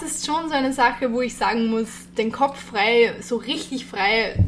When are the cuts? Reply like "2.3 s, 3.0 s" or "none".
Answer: none